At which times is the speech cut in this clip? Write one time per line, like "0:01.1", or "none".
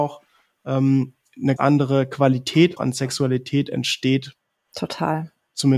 0:01.6
0:02.8